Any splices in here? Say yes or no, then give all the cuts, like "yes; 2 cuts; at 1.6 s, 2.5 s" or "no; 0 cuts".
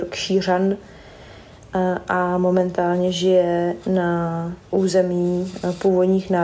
yes; 1 cut; at 4.6 s